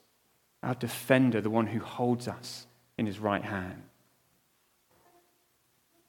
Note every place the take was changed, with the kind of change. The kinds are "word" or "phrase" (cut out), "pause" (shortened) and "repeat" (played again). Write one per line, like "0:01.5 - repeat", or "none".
none